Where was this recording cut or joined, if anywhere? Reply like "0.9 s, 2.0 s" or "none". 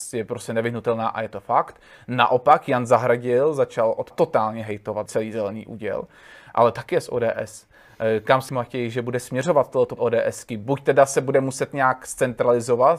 4.1 s, 5.1 s, 8.5 s, 10.0 s